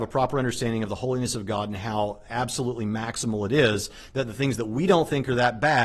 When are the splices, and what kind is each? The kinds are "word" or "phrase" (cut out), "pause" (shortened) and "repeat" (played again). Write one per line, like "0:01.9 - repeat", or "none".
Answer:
none